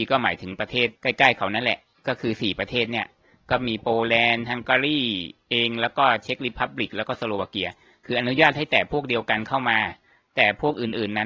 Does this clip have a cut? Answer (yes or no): yes